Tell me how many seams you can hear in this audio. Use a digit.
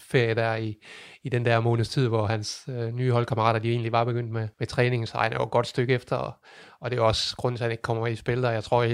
1